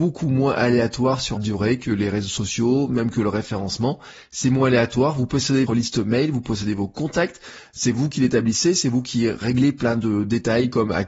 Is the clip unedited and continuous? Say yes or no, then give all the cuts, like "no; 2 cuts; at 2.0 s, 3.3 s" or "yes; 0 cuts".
no; 2 cuts; at 1.4 s, 5.7 s